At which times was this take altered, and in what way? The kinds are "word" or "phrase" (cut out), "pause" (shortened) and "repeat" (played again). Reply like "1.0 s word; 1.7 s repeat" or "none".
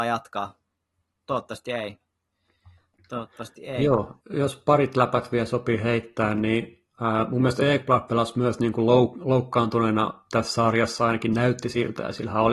2.3 s pause; 4.2 s pause